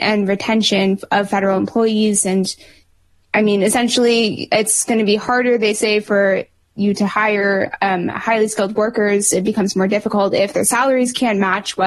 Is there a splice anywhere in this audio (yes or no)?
no